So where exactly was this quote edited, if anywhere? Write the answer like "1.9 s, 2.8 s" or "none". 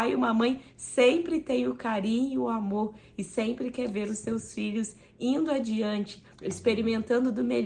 6.3 s